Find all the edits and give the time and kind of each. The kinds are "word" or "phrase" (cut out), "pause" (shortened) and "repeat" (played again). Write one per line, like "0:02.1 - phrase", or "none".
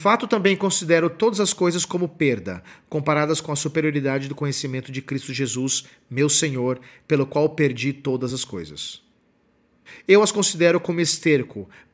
none